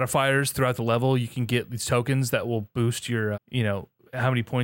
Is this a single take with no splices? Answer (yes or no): no